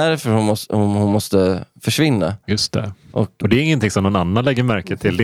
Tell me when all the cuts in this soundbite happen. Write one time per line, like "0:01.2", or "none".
0:03.4